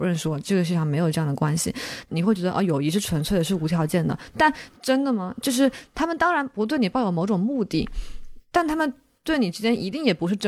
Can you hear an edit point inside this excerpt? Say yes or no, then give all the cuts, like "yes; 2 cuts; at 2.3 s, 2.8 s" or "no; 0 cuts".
no; 0 cuts